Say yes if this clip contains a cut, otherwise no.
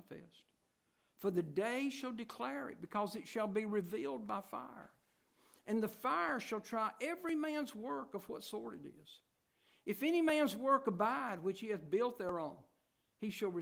no